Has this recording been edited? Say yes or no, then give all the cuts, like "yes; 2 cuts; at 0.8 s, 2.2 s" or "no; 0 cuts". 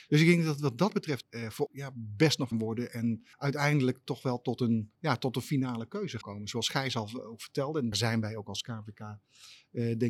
yes; 7 cuts; at 1.2 s, 1.7 s, 2.5 s, 3.3 s, 4.9 s, 6.2 s, 7.9 s